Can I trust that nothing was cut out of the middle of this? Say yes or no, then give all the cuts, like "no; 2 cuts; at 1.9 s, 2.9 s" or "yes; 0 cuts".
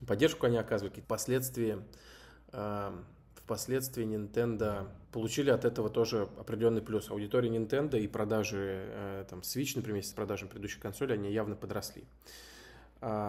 no; 3 cuts; at 1.0 s, 5.0 s, 10.1 s